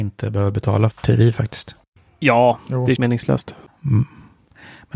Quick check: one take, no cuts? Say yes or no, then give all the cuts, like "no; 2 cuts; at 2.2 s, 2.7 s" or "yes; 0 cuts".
no; 2 cuts; at 0.9 s, 3.0 s